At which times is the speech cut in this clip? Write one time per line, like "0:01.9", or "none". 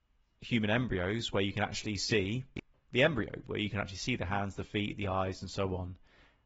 none